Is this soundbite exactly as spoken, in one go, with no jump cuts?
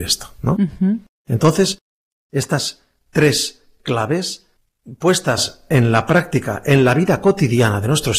yes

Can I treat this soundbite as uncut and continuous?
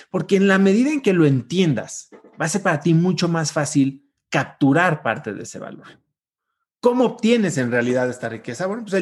yes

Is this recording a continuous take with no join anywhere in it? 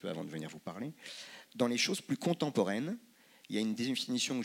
no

